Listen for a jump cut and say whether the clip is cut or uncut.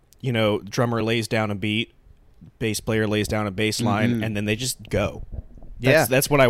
uncut